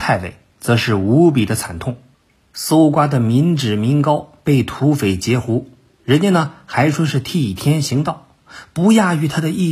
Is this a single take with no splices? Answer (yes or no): yes